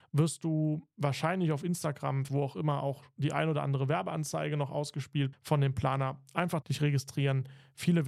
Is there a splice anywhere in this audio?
yes; 3 cuts; at 2.3 s, 5.3 s, 6.6 s

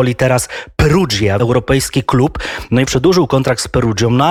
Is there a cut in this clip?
yes; 2 cuts; at 1.4 s, 2.9 s

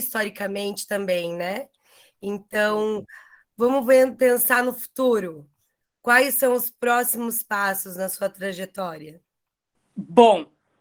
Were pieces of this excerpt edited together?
no; 0 cuts

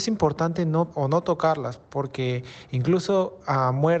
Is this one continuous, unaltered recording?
no; 1 cut; at 0.9 s

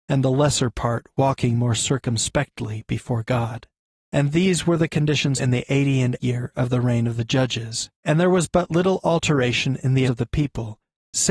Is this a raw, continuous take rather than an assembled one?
no; 5 cuts; at 3.9 s, 5.4 s, 6.2 s, 7.9 s, 10.1 s

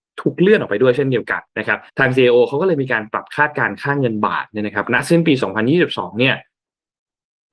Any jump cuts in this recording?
yes; 2 cuts; at 1.5 s, 1.9 s

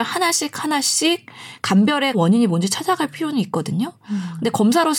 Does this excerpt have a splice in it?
yes; 1 cut; at 2.1 s

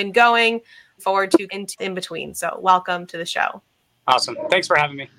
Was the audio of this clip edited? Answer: yes; 3 cuts; at 1.0 s, 1.5 s, 1.8 s

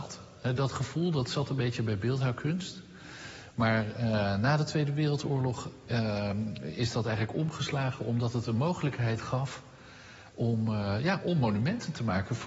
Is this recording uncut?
yes; 0 cuts

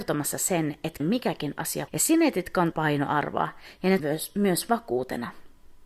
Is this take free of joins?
no; 4 cuts; at 1.0 s, 1.9 s, 2.7 s, 4.0 s

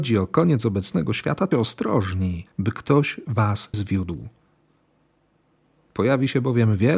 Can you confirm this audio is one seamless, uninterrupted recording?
no; 3 cuts; at 1.5 s, 2.5 s, 3.7 s

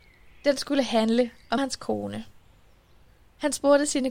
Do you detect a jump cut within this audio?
yes; 1 cut; at 1.6 s

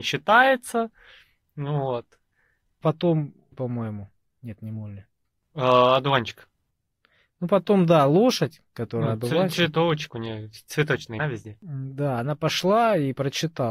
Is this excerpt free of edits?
no; 3 cuts; at 3.5 s, 10.1 s, 11.2 s

